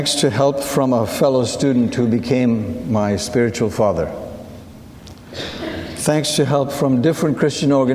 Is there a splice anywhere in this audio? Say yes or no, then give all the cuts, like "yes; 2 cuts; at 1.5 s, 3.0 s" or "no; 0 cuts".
no; 0 cuts